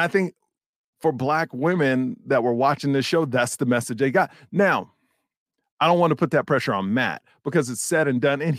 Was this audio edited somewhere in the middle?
no; 0 cuts

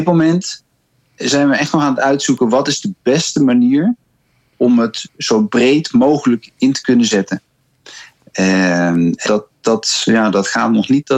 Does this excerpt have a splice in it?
yes; 1 cut; at 9.3 s

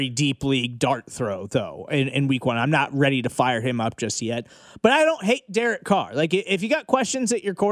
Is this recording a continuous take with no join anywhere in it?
yes; 0 cuts

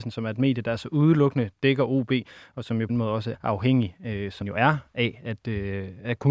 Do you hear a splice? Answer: yes; 3 cuts; at 2.9 s, 3.3 s, 4.4 s

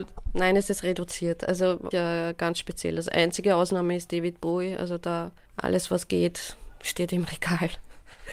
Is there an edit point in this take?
yes; 1 cut; at 1.9 s

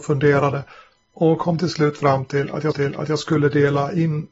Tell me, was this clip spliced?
yes; 1 cut; at 2.7 s

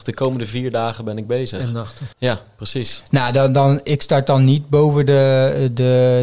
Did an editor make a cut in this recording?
yes; 1 cut; at 2.1 s

